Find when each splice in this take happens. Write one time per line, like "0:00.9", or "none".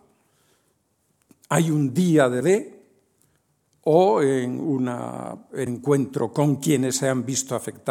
0:02.4
0:05.7